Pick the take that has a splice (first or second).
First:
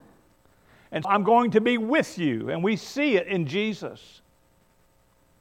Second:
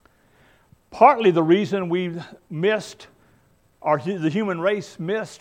first